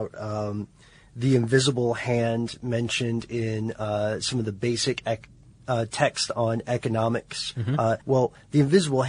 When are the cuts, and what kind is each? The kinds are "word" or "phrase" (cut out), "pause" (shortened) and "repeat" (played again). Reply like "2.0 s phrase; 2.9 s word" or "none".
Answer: 8.0 s pause